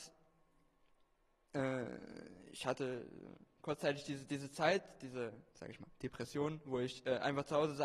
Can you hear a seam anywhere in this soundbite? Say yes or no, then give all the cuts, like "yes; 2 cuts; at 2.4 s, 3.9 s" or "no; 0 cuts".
yes; 1 cut; at 5.5 s